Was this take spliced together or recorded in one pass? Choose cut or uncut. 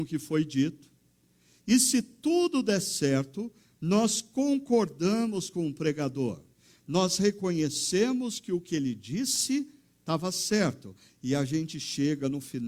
uncut